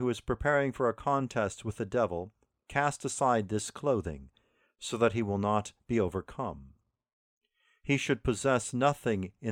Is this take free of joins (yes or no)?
yes